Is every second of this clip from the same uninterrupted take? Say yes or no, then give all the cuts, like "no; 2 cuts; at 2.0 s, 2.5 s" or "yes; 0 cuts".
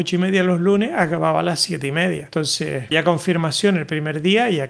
no; 1 cut; at 2.9 s